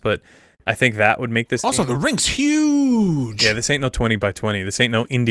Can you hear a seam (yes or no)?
no